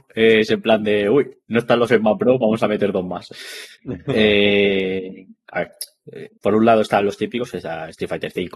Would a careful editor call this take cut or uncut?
cut